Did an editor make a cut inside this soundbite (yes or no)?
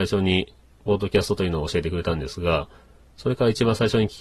no